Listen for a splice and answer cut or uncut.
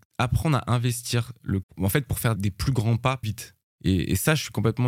cut